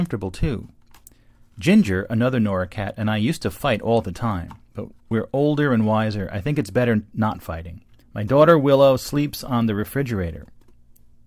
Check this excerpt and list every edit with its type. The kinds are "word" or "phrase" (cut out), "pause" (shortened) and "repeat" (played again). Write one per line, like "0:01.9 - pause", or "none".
0:05.0 - pause
0:08.0 - pause